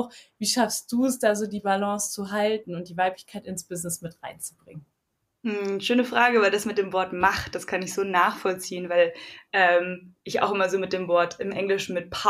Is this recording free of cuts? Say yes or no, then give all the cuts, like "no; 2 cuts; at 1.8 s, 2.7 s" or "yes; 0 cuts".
yes; 0 cuts